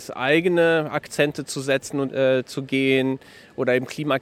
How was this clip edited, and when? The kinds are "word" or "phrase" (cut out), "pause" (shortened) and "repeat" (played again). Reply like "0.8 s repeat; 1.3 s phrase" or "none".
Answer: 2.1 s phrase